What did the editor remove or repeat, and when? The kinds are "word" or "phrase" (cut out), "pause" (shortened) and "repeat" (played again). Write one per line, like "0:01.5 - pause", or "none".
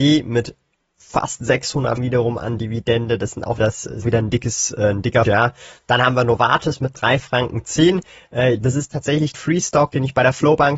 0:02.0 - word
0:03.6 - word
0:04.0 - word
0:05.2 - word
0:09.3 - word